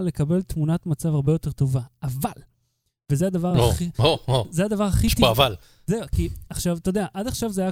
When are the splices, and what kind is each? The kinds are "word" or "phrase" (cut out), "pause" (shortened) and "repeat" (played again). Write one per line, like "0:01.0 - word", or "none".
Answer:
none